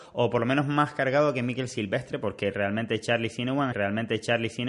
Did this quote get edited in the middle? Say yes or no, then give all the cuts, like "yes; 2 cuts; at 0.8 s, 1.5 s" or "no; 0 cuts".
yes; 1 cut; at 3.7 s